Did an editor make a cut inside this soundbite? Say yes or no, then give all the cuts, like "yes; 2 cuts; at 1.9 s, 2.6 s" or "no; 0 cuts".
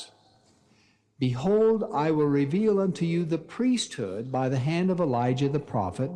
no; 0 cuts